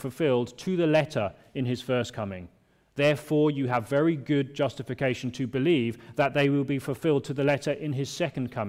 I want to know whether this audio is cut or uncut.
uncut